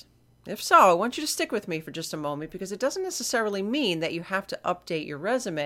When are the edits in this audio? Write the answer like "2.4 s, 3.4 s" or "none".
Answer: none